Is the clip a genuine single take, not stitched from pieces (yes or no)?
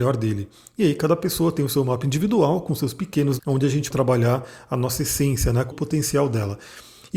no